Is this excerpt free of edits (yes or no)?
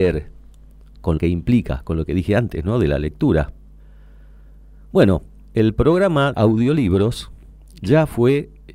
no